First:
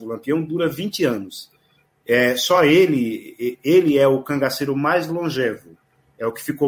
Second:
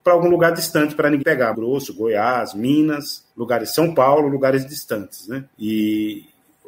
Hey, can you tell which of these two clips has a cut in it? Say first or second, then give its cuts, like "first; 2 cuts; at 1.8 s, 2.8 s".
second; 4 cuts; at 1.2 s, 1.5 s, 3.3 s, 5.5 s